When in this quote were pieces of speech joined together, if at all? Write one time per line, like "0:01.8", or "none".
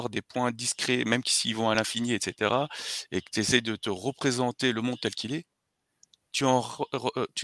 none